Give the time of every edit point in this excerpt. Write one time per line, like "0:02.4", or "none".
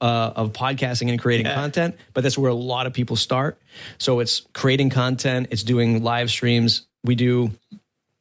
0:04.5